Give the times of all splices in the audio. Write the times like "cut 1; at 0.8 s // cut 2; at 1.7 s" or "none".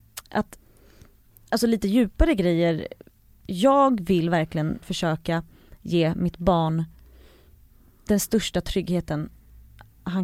cut 1; at 4.8 s